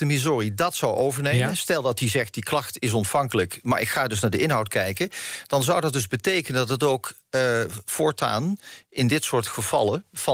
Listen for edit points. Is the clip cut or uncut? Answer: uncut